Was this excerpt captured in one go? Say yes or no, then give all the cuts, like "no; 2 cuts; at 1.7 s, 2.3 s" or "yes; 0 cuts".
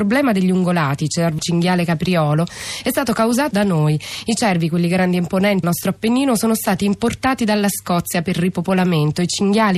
no; 3 cuts; at 1.4 s, 3.5 s, 5.6 s